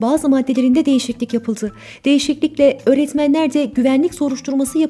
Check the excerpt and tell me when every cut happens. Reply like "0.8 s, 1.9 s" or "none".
none